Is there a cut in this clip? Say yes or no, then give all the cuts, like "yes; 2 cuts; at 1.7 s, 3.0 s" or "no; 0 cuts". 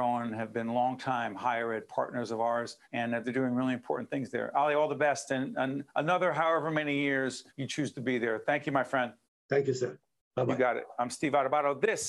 yes; 4 cuts; at 2.8 s, 5.9 s, 7.5 s, 9.2 s